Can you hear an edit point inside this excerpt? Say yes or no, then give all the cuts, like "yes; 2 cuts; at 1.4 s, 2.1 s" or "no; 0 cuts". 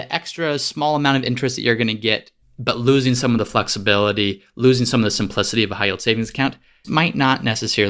yes; 2 cuts; at 2.4 s, 6.8 s